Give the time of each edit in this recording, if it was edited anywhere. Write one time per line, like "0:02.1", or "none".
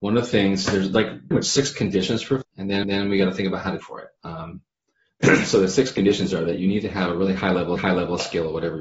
0:01.3
0:02.4
0:02.8
0:03.8
0:04.2
0:07.8